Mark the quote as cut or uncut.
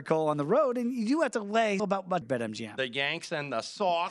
cut